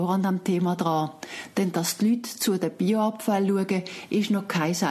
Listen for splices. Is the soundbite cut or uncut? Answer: uncut